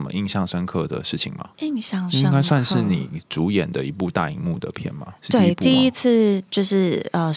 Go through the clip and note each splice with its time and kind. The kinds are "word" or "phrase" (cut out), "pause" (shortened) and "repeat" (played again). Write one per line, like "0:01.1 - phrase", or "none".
0:01.5 - pause
0:05.2 - pause